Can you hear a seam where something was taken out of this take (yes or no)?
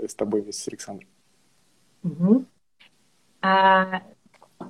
no